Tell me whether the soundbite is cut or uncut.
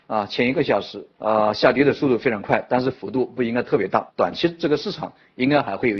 cut